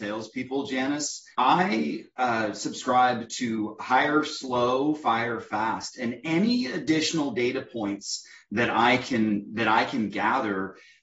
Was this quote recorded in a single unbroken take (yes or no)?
no